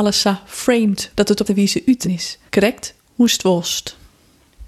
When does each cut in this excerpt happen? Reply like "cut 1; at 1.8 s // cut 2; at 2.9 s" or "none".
cut 1; at 1.1 s // cut 2; at 1.5 s // cut 3; at 2.0 s // cut 4; at 2.5 s

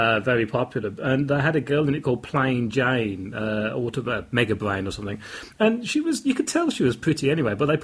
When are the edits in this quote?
none

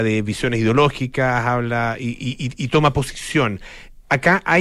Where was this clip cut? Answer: none

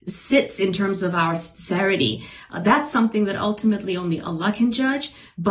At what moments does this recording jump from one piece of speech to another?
none

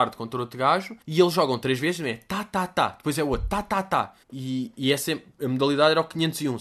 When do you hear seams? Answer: cut 1; at 1.0 s // cut 2; at 4.2 s // cut 3; at 5.3 s

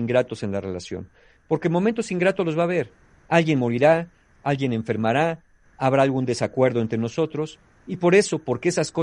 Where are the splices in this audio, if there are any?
none

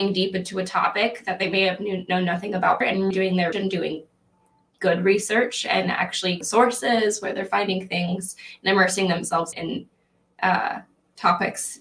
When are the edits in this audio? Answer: cut 1; at 2.8 s // cut 2; at 3.1 s // cut 3; at 3.5 s // cut 4; at 6.4 s // cut 5; at 9.5 s

